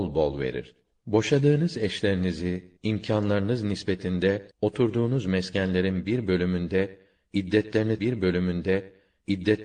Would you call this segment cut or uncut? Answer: cut